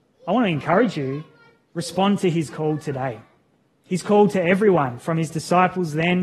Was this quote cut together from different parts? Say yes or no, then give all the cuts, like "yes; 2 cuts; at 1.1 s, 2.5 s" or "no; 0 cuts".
no; 0 cuts